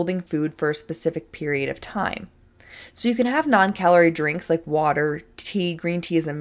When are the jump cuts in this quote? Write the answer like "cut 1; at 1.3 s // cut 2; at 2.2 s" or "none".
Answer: none